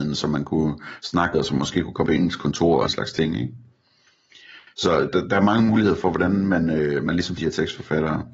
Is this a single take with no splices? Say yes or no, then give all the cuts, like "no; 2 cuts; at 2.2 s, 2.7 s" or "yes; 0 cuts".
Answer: no; 5 cuts; at 1.3 s, 2.1 s, 2.9 s, 5.1 s, 7.4 s